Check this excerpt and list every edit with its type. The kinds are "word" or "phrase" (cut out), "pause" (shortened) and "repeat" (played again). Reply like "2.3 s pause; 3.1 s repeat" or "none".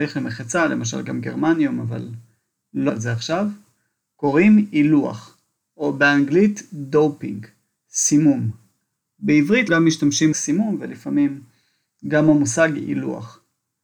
2.9 s word; 9.7 s word; 10.3 s word